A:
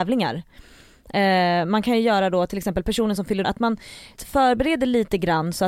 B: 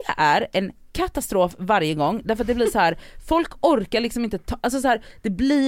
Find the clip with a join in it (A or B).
A